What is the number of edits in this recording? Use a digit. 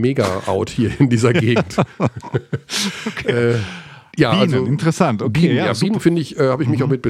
0